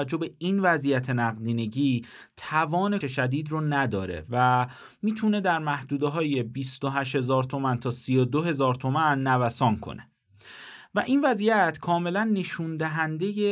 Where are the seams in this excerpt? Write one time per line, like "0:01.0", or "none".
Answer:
0:03.0